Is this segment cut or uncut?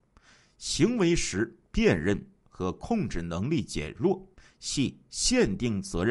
cut